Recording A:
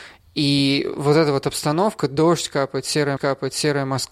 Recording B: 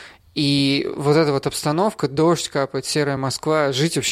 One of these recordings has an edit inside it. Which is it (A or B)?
A